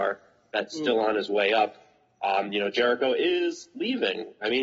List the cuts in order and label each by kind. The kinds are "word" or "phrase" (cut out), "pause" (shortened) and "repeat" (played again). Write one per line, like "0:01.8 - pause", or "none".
none